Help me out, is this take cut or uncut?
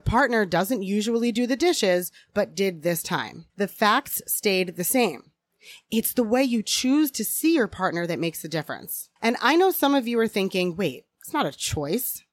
cut